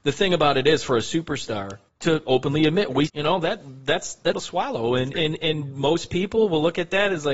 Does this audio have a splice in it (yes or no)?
yes